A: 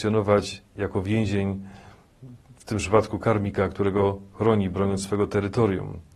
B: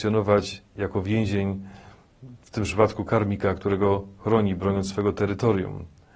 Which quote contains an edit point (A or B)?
B